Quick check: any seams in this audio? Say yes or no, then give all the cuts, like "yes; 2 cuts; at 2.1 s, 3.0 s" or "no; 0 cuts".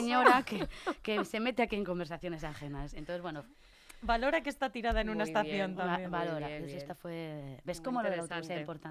yes; 1 cut; at 6.6 s